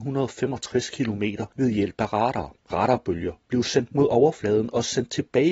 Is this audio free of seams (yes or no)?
no